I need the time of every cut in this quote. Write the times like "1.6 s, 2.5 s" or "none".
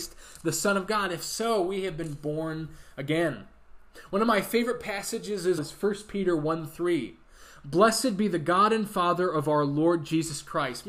5.6 s